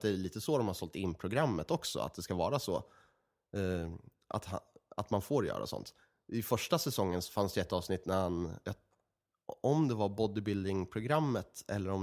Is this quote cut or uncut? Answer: uncut